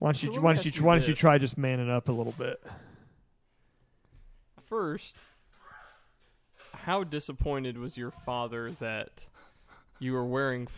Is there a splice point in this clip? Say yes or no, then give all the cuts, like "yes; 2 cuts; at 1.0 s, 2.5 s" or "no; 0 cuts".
yes; 1 cut; at 4.6 s